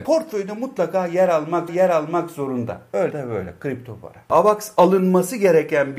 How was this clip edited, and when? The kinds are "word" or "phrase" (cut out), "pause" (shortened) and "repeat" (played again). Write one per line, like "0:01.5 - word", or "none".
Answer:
0:01.7 - repeat
0:03.1 - word